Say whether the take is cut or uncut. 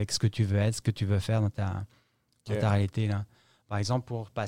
uncut